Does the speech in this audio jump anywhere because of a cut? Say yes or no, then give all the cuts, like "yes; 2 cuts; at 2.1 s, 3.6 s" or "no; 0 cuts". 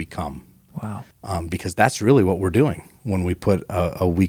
yes; 2 cuts; at 1.1 s, 3.0 s